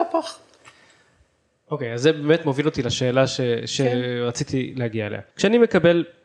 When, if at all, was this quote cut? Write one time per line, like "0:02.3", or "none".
0:05.3